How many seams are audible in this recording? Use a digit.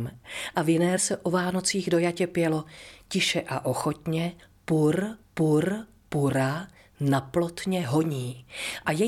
2